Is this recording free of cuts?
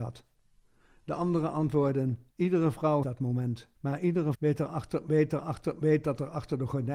no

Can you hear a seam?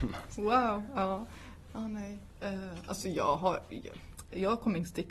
no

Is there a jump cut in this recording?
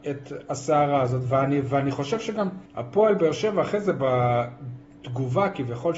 yes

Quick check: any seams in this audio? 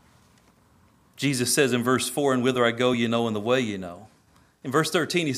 no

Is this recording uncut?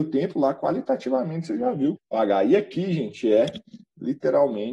no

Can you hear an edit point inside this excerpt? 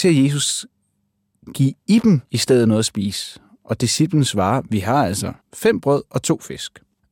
yes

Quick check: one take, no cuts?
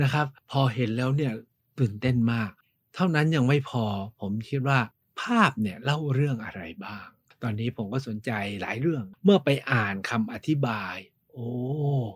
yes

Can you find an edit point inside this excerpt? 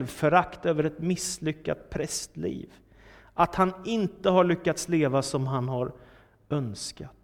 no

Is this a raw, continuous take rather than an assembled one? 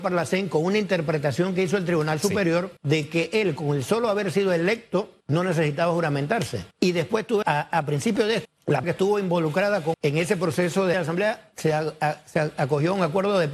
no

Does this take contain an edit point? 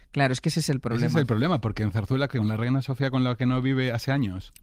no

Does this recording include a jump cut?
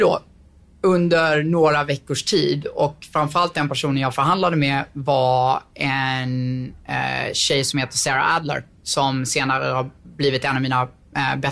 no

